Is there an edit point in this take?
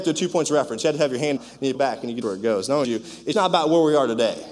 yes; 5 cuts; at 1.4 s, 1.7 s, 2.2 s, 2.8 s, 3.3 s

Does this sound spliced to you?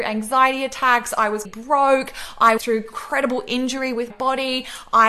yes; 3 cuts; at 1.4 s, 2.6 s, 4.1 s

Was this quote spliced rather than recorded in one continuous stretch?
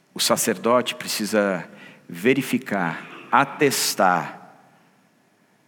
no; 0 cuts

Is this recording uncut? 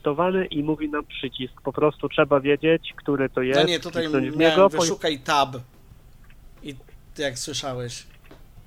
yes; 0 cuts

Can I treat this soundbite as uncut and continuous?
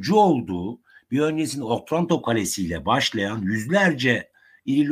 yes; 0 cuts

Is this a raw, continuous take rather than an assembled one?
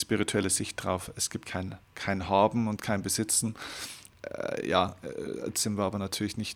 no; 2 cuts; at 1.4 s, 1.8 s

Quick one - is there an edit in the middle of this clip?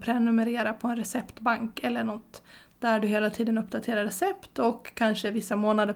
no; 0 cuts

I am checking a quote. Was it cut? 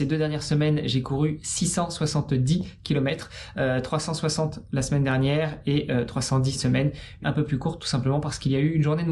yes; 2 cuts; at 6.5 s, 7.2 s

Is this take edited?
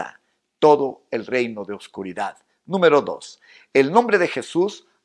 no; 0 cuts

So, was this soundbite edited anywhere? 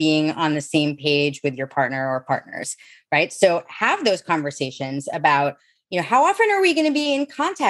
no; 0 cuts

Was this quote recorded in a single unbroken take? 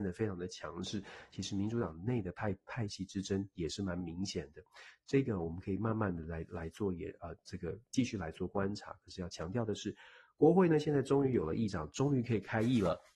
yes; 0 cuts

